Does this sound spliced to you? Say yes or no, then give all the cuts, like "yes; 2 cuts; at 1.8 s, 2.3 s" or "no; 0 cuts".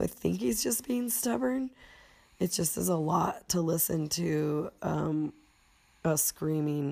no; 0 cuts